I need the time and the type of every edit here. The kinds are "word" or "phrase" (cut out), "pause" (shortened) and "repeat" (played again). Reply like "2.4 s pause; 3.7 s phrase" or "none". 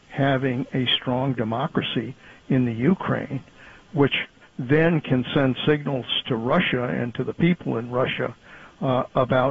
none